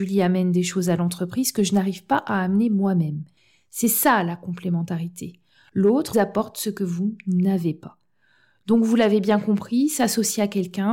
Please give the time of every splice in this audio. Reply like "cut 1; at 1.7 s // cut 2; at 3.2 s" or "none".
cut 1; at 6.1 s